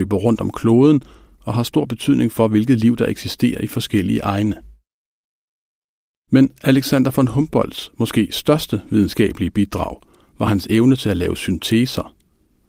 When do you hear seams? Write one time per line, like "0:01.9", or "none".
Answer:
none